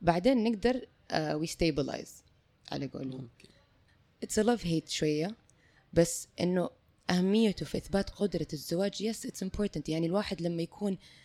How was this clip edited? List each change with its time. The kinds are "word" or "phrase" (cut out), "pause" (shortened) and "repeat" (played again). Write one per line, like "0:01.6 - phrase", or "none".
none